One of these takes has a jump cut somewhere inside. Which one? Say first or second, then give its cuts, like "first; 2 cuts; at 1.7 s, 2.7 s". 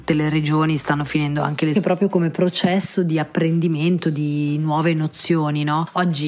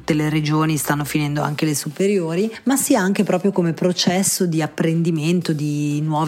first; 1 cut; at 1.7 s